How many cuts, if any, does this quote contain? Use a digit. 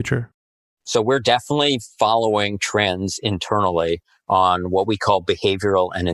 0